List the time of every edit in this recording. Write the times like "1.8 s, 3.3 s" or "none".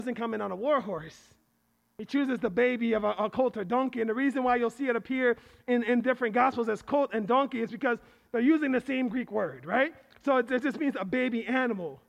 none